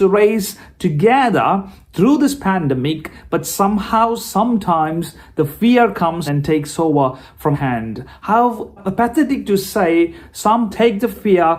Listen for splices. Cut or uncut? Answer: cut